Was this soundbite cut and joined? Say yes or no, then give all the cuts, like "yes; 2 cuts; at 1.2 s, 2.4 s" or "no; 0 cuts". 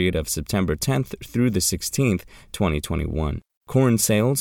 no; 0 cuts